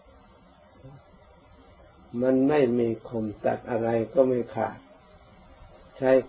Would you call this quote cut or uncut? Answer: uncut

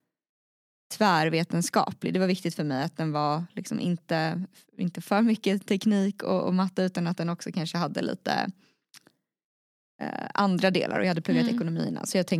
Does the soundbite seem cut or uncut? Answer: uncut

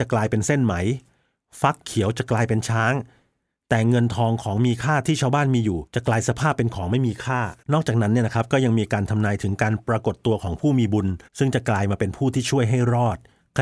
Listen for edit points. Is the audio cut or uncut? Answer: cut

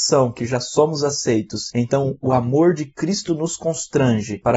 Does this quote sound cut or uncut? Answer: uncut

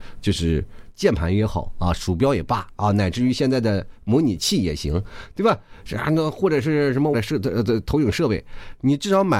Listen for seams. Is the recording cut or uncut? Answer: cut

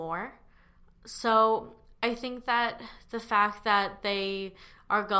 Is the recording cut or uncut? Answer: uncut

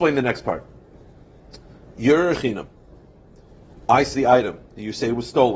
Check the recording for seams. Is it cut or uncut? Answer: cut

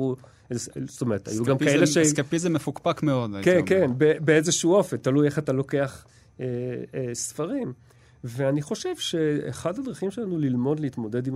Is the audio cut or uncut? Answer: uncut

